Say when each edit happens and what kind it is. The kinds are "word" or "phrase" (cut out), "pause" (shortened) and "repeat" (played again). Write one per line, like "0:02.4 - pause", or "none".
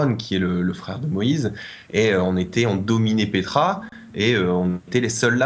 none